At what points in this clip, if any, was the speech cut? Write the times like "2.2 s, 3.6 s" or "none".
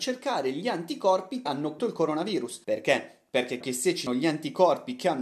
1.5 s, 1.8 s, 2.6 s, 3.6 s, 4.1 s